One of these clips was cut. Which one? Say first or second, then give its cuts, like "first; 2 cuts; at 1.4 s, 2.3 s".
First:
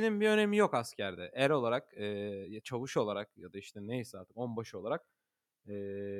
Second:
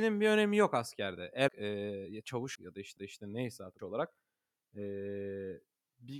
second; 4 cuts; at 1.5 s, 2.6 s, 3.0 s, 3.8 s